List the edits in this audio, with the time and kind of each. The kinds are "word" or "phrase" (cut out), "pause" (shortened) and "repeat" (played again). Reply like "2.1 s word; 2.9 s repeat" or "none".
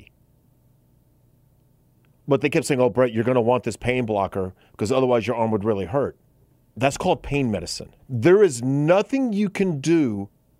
6.5 s pause; 8.0 s pause